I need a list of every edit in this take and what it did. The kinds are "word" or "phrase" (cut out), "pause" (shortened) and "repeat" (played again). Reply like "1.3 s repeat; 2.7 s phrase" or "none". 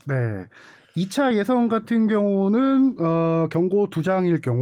none